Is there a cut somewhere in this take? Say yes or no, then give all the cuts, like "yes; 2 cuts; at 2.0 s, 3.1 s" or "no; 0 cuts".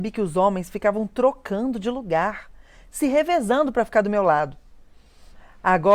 no; 0 cuts